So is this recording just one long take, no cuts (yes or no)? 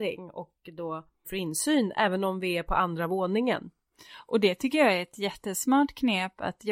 no